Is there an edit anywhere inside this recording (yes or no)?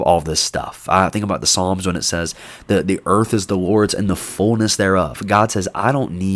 no